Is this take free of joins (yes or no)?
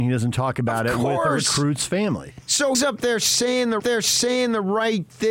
no